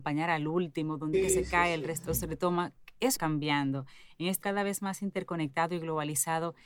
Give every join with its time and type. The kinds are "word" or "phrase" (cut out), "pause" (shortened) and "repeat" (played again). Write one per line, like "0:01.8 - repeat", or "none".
0:01.1 - word
0:02.0 - word
0:03.1 - word
0:04.4 - word